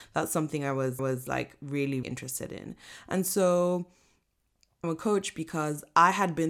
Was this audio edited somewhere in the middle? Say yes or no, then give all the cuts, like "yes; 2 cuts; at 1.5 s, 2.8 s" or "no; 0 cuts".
yes; 3 cuts; at 1.0 s, 2.0 s, 4.8 s